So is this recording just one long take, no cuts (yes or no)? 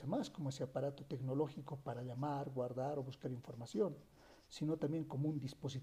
yes